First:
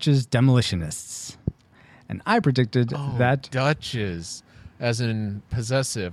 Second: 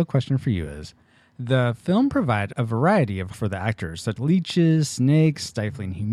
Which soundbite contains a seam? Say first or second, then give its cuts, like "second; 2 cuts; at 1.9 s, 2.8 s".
second; 4 cuts; at 1.0 s, 2.5 s, 3.3 s, 4.2 s